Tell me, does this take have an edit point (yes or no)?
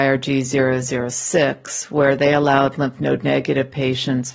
no